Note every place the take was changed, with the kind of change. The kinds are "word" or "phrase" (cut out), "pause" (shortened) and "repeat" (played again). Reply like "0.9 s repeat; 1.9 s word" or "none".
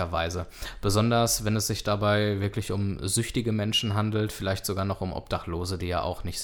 none